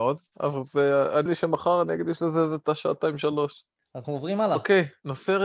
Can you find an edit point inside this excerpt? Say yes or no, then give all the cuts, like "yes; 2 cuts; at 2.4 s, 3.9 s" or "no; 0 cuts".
yes; 2 cuts; at 1.3 s, 4.0 s